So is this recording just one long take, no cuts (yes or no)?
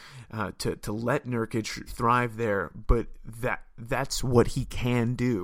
no